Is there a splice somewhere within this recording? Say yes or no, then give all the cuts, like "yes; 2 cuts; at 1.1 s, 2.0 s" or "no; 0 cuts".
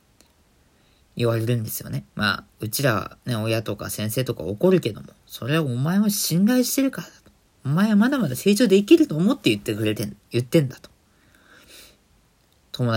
yes; 3 cuts; at 2.1 s, 2.5 s, 3.2 s